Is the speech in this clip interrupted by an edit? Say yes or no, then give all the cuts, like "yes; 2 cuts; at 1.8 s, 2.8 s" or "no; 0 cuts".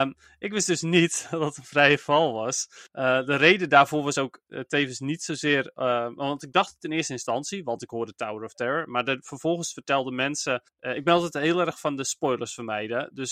yes; 2 cuts; at 2.9 s, 10.7 s